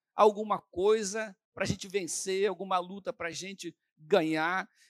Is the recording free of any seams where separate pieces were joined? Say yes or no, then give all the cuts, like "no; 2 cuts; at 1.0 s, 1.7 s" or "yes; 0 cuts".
yes; 0 cuts